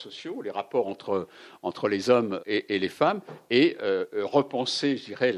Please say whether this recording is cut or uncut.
cut